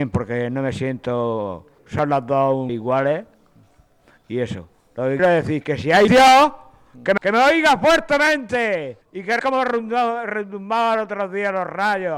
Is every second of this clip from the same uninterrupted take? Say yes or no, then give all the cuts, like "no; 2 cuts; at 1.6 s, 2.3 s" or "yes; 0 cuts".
no; 7 cuts; at 1.8 s, 2.7 s, 5.2 s, 6.1 s, 7.2 s, 9.0 s, 9.4 s